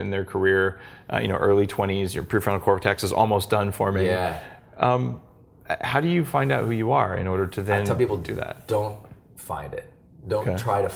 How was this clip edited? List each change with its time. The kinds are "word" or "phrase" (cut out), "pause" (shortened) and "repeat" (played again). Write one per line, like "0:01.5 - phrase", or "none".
none